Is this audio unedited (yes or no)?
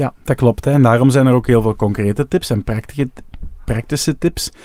yes